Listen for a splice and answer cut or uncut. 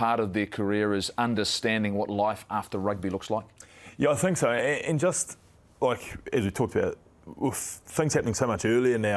uncut